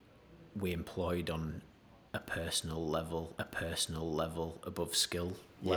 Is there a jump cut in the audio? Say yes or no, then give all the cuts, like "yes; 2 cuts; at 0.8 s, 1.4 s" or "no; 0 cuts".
yes; 2 cuts; at 2.1 s, 3.4 s